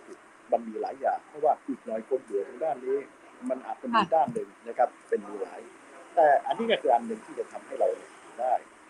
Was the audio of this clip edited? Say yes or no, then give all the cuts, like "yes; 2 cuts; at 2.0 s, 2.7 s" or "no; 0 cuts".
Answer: yes; 2 cuts; at 1.6 s, 4.6 s